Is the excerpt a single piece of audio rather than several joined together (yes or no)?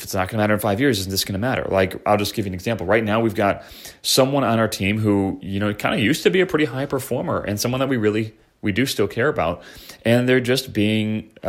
yes